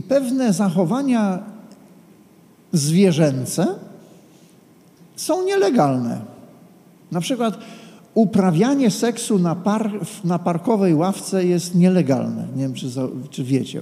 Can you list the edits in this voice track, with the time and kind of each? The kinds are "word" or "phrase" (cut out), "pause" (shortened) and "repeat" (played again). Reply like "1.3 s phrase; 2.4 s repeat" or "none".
none